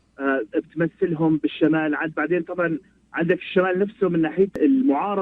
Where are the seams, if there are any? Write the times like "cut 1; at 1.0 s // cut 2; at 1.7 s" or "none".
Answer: none